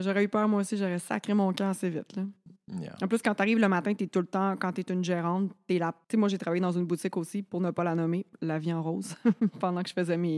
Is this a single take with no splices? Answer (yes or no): no